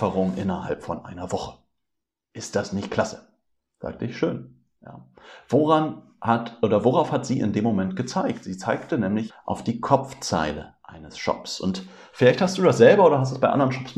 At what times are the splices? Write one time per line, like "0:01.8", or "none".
0:09.3

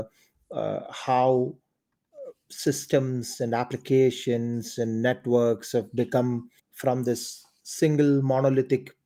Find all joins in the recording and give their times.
0:06.6

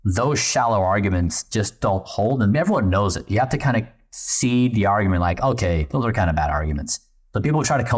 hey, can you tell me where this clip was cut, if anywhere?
none

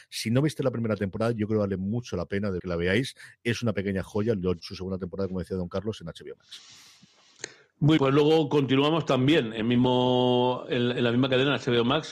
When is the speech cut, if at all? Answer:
0:02.6
0:04.6
0:08.0

